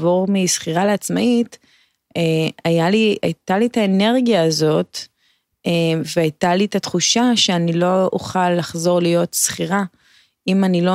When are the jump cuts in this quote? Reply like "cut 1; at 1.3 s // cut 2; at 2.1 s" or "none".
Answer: none